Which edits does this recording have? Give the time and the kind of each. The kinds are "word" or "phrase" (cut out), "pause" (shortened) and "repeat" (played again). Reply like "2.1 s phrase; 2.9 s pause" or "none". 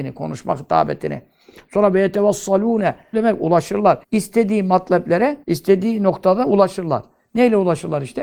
3.1 s word; 4.0 s pause; 5.4 s pause